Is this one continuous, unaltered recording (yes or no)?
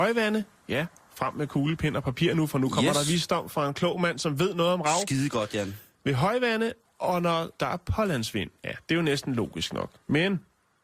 no